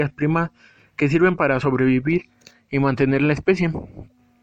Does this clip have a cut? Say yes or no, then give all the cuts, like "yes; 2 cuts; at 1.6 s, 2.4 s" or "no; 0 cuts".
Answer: no; 0 cuts